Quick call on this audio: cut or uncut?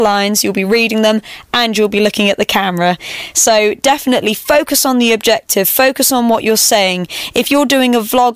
uncut